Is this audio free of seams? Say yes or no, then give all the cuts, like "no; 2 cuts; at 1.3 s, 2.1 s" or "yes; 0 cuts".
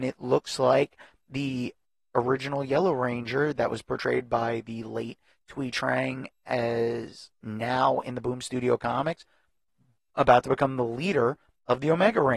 yes; 0 cuts